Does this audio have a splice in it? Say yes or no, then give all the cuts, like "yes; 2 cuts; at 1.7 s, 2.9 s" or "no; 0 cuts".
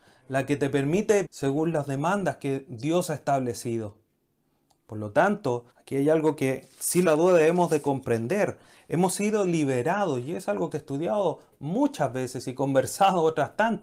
yes; 4 cuts; at 1.2 s, 5.7 s, 7.1 s, 10.7 s